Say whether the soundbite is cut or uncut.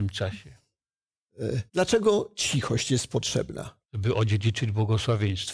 cut